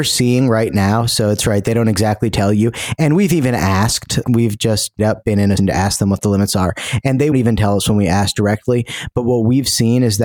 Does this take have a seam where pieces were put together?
yes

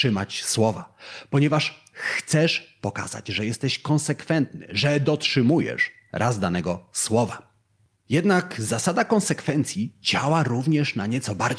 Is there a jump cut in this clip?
no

